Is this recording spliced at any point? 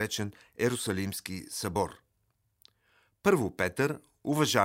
no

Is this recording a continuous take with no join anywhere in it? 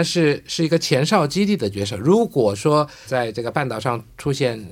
no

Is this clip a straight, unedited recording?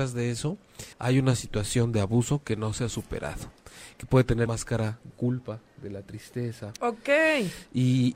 no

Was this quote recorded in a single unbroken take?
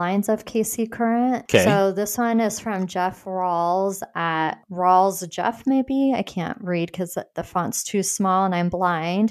yes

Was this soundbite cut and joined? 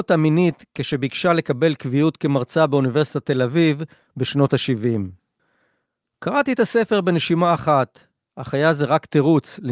no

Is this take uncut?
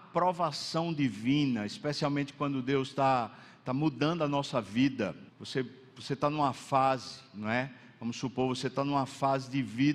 no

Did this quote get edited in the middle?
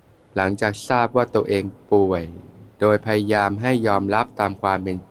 yes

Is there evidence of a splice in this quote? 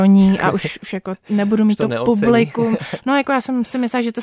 no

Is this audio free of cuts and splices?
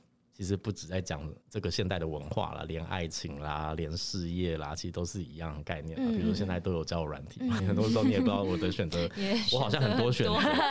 no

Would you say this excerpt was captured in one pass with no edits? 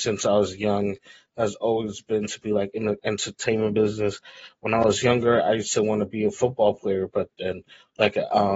yes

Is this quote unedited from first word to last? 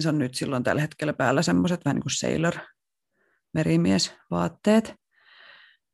yes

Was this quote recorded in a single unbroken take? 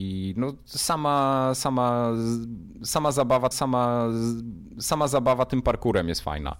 no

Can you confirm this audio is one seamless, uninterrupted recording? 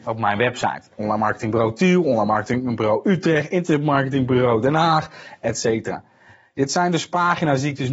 yes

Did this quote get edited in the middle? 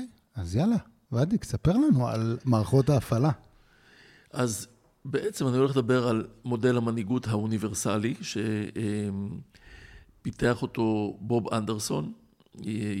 no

